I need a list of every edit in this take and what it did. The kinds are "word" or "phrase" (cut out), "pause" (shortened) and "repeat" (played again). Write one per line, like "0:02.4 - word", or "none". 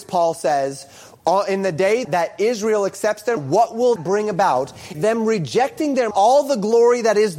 0:02.0 - word
0:03.4 - word
0:04.0 - word
0:04.9 - word
0:06.1 - phrase